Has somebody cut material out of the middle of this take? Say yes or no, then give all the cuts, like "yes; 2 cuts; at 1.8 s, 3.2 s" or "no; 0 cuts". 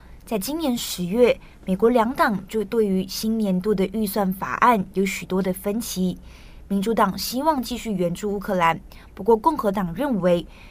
no; 0 cuts